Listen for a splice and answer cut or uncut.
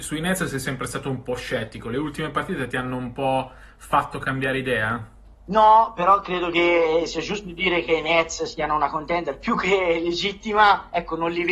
cut